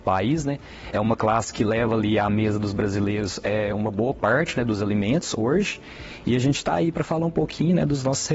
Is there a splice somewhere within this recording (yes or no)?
no